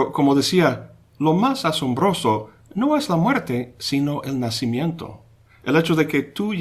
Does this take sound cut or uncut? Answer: uncut